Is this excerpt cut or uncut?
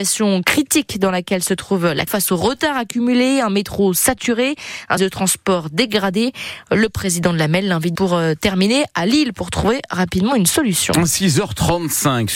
cut